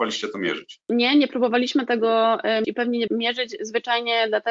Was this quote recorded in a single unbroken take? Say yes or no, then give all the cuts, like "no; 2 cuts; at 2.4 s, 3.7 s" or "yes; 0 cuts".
no; 2 cuts; at 2.6 s, 3.1 s